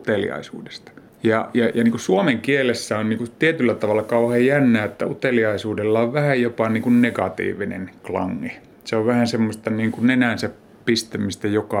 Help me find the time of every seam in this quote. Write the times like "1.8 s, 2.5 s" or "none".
none